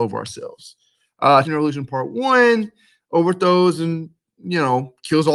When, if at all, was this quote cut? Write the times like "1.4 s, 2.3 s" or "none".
1.4 s